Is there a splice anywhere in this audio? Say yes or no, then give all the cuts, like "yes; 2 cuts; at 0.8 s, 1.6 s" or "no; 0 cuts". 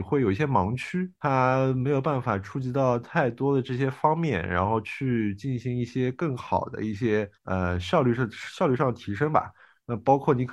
yes; 2 cuts; at 1.2 s, 7.3 s